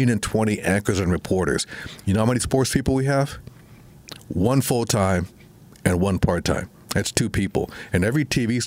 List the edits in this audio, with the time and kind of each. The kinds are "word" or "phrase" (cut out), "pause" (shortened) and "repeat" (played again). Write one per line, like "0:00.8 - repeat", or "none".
none